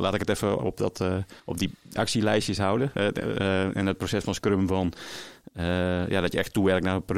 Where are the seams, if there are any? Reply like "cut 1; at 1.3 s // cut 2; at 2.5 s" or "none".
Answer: cut 1; at 1.4 s // cut 2; at 2.0 s